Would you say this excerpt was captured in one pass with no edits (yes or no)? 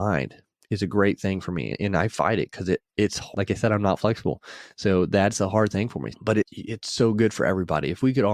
yes